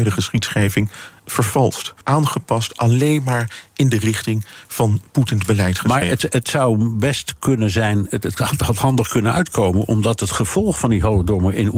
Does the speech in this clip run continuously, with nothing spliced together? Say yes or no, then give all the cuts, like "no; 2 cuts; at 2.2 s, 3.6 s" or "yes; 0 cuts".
no; 1 cut; at 2.0 s